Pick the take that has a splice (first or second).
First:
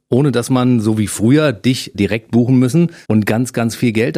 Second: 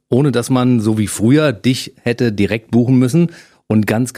first